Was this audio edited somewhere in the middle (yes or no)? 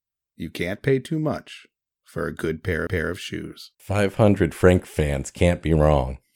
yes